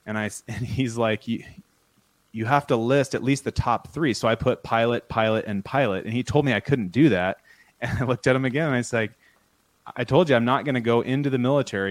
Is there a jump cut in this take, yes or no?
no